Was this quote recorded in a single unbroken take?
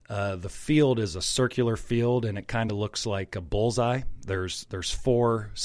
yes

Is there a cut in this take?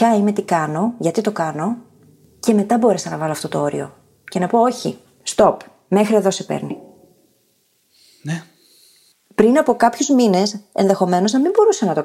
no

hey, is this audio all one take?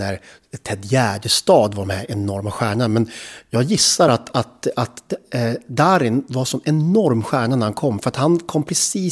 yes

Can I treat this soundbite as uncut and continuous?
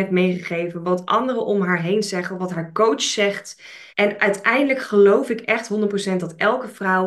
no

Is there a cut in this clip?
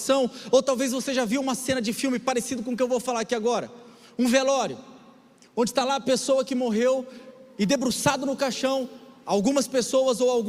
no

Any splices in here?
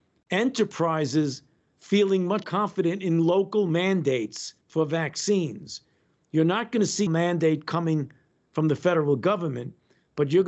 yes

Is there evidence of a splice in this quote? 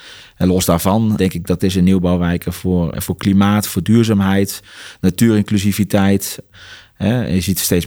yes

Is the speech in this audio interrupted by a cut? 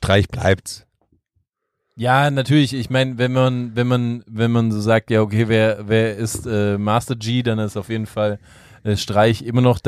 no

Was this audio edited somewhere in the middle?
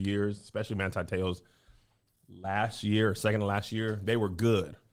no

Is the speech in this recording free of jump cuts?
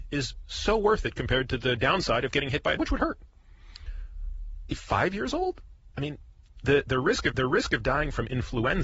no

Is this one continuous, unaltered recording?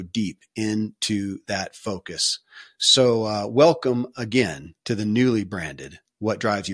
no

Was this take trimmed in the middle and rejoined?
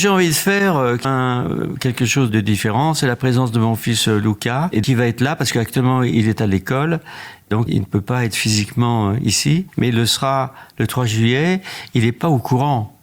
yes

